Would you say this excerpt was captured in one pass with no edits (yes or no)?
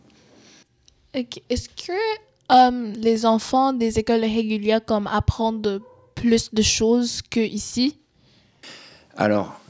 yes